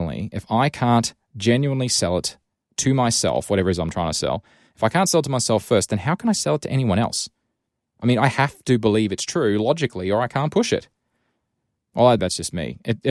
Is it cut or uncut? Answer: cut